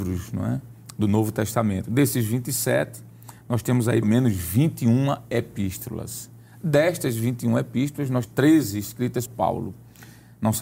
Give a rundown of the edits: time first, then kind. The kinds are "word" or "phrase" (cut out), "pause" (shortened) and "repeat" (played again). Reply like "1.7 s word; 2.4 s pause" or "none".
4.0 s word; 8.3 s word; 9.3 s word